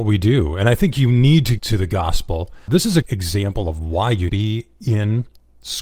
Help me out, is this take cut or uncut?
cut